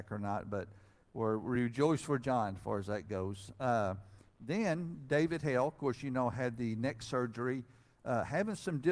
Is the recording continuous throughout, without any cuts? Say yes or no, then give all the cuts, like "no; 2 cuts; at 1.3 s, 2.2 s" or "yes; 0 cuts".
yes; 0 cuts